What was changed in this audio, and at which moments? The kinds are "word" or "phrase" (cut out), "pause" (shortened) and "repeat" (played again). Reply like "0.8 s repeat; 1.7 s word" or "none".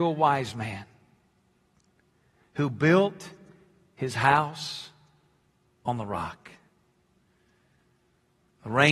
none